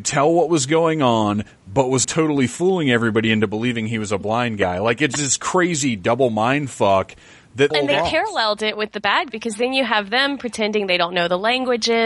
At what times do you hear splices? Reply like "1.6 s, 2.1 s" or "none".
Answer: 2.0 s, 7.7 s, 9.3 s